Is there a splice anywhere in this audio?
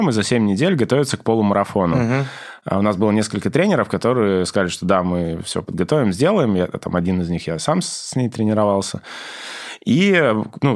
no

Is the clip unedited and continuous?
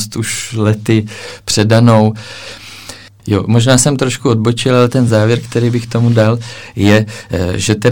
yes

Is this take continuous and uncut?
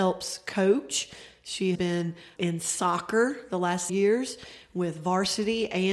no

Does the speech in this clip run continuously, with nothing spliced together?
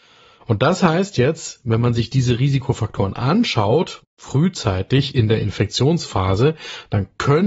yes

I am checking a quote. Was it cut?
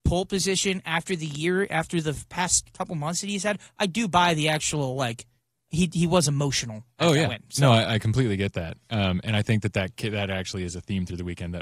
no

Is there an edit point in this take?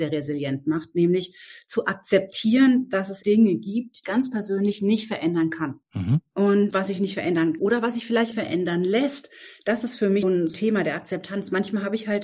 yes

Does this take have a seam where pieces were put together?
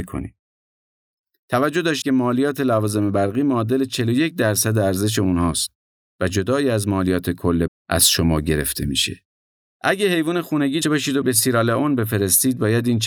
yes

